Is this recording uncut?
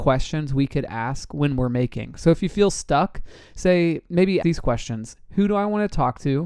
no; 1 cut; at 4.4 s

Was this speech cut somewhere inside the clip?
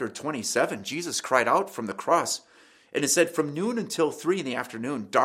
no; 0 cuts

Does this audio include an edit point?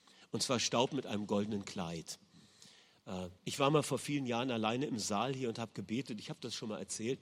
yes; 1 cut; at 3.4 s

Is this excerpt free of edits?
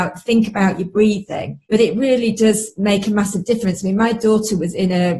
no; 1 cut; at 1.6 s

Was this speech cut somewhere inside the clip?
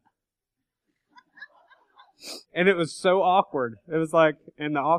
yes; 1 cut; at 2.4 s

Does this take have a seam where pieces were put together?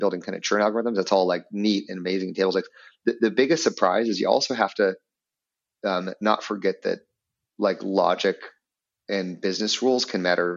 no; 0 cuts

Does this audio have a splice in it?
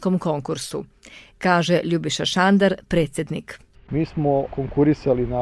no; 0 cuts

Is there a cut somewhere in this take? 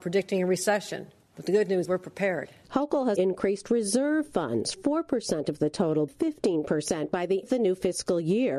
yes; 6 cuts; at 1.2 s, 1.9 s, 3.2 s, 4.7 s, 6.1 s, 7.4 s

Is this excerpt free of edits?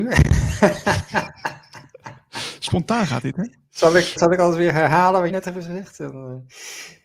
no; 2 cuts; at 4.2 s, 5.3 s

